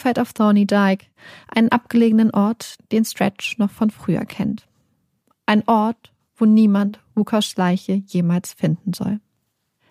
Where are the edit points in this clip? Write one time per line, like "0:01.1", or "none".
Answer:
none